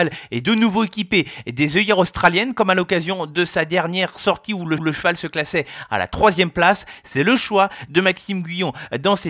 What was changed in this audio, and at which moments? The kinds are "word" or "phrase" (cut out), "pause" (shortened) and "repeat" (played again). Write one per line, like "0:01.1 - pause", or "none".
0:04.8 - repeat

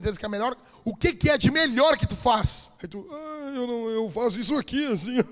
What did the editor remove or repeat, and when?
0:02.7 - pause

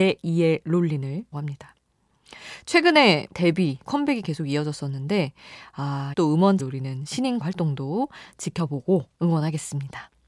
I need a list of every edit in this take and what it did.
0:01.3 - word
0:03.3 - word
0:03.8 - word
0:06.1 - word
0:06.6 - word
0:07.4 - word

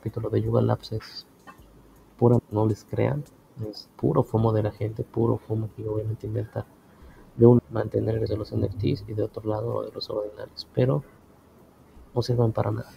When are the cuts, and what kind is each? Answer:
0:02.4 - word
0:07.6 - word
0:08.3 - word

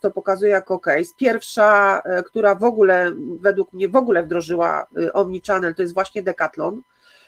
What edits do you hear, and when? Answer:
none

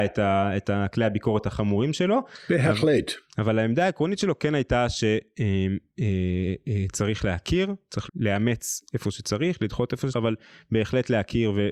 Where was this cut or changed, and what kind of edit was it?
0:08.1 - word
0:10.1 - word

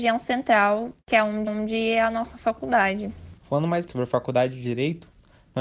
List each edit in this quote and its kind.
0:01.5 - repeat
0:03.4 - pause
0:03.9 - word

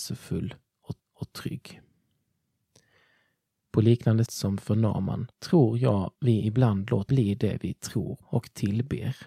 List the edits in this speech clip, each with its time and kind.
0:01.0 - repeat
0:04.3 - word
0:05.3 - pause
0:06.1 - pause
0:07.1 - word
0:08.2 - word

